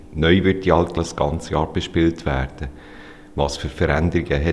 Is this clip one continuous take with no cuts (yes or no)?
no